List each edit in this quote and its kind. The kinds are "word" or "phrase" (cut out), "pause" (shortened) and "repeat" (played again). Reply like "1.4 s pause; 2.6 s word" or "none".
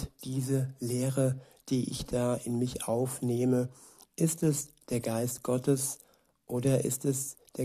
none